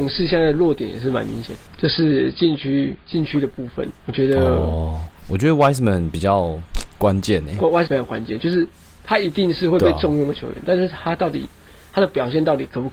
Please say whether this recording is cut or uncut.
cut